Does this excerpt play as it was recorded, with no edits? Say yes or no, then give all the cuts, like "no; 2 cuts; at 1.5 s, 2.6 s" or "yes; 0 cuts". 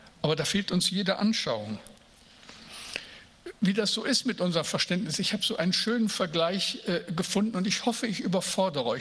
yes; 0 cuts